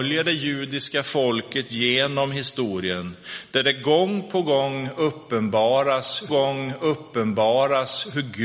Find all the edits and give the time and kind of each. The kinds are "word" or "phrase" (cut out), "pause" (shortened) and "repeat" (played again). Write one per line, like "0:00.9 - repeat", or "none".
0:06.3 - repeat